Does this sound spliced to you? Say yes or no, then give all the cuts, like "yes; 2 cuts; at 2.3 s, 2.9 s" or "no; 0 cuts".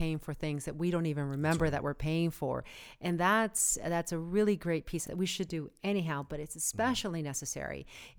yes; 1 cut; at 5.1 s